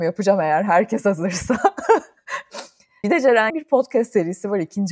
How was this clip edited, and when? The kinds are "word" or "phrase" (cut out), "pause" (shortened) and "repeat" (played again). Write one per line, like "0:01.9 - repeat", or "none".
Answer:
0:03.0 - word
0:03.5 - word